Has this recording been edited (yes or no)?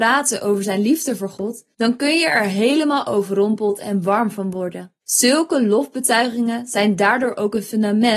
yes